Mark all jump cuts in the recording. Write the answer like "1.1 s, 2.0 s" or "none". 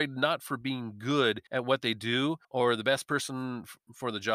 1.5 s, 2.4 s